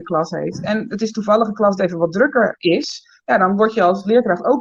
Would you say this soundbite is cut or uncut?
cut